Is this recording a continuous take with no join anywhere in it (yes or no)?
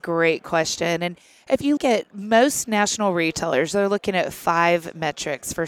no